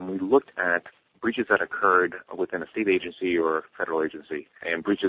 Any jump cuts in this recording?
no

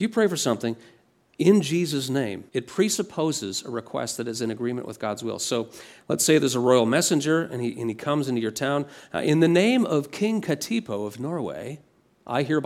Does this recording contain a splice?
yes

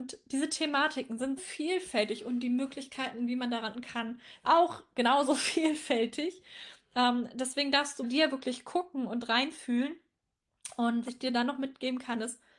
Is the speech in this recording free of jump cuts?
no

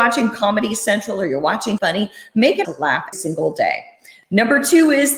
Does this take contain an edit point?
yes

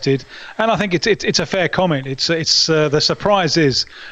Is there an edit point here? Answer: no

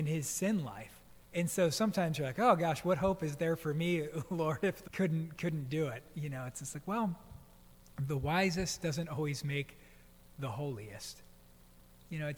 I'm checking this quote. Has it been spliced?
yes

